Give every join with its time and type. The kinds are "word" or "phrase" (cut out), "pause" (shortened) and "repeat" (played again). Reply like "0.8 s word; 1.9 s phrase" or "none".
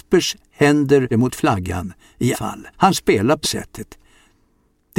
1.1 s phrase; 2.3 s word; 2.7 s pause; 3.4 s word